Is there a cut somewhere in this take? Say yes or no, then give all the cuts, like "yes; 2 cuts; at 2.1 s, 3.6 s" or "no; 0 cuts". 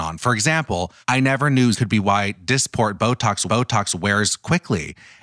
yes; 3 cuts; at 1.0 s, 1.7 s, 3.5 s